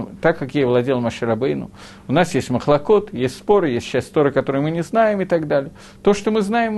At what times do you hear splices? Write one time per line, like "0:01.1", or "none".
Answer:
none